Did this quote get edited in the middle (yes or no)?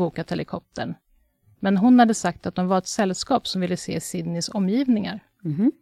no